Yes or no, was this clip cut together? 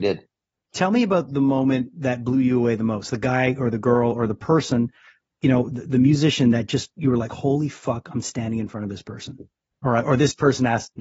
no